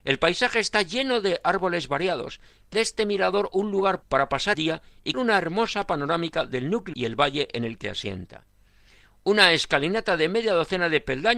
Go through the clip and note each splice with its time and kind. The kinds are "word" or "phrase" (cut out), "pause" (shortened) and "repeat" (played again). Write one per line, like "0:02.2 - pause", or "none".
0:02.7 - word
0:04.0 - word
0:04.5 - word
0:05.1 - word
0:06.9 - word
0:07.8 - word